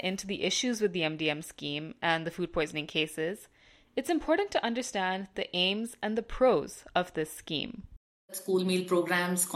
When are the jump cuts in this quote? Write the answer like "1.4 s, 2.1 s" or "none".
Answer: none